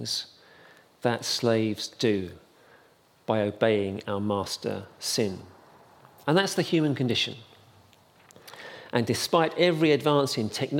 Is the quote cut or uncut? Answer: uncut